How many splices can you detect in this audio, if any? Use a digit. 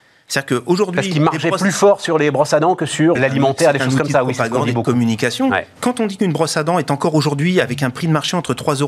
2